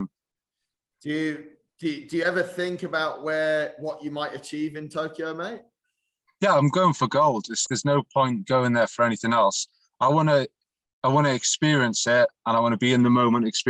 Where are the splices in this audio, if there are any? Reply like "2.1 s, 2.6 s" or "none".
7.7 s